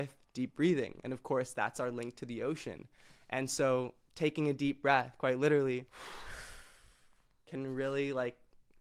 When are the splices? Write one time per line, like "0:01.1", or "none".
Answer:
0:05.9

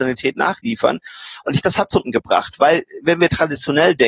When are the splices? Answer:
0:01.6
0:02.0

